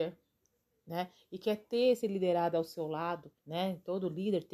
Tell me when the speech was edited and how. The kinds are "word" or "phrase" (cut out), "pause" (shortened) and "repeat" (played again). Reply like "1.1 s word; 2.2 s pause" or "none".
3.4 s pause